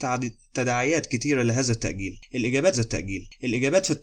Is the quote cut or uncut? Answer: cut